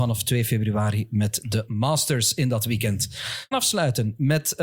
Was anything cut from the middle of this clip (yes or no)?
yes